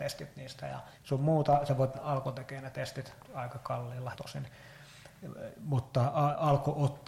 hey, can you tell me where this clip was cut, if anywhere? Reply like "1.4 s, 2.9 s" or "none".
1.0 s, 1.9 s, 3.2 s, 4.1 s